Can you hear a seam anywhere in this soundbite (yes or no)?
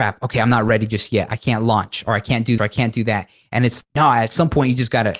yes